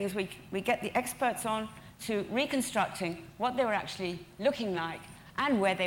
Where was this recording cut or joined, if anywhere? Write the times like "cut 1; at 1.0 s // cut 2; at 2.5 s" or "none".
none